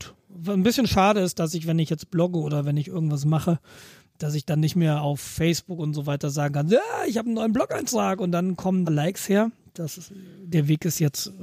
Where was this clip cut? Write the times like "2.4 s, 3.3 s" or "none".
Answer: 8.8 s